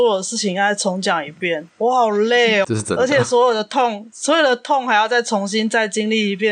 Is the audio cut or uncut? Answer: cut